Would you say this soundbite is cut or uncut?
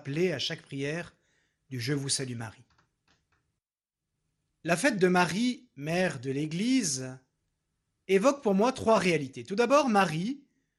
uncut